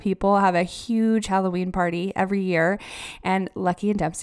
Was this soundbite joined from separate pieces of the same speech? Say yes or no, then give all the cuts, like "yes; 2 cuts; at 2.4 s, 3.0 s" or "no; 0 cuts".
no; 0 cuts